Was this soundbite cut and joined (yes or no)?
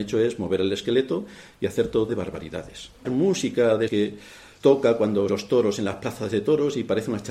yes